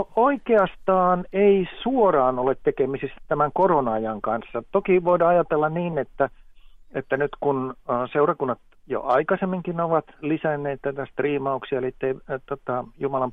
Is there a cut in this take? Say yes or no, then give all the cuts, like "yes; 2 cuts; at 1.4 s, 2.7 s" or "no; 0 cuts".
no; 0 cuts